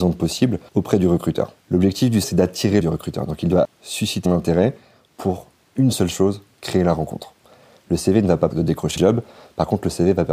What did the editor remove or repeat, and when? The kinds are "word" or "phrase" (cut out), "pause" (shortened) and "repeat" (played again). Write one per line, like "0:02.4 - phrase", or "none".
0:02.2 - word
0:02.8 - word
0:03.6 - word
0:04.3 - word
0:08.5 - word
0:09.0 - word